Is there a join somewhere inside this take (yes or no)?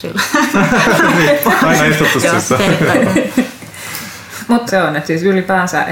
yes